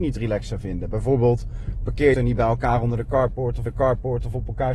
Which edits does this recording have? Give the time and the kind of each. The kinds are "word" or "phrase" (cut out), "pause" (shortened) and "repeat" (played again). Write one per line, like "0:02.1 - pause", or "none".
0:02.1 - phrase
0:03.7 - repeat